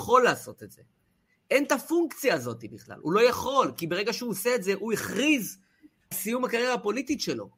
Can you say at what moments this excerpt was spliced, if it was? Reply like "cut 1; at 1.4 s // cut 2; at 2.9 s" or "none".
cut 1; at 6.1 s